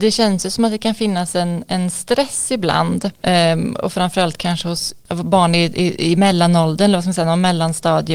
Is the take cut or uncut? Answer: uncut